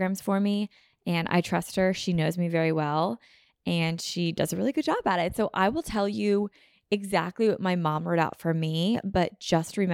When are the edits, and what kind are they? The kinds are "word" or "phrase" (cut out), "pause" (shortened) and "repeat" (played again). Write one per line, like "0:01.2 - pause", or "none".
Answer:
none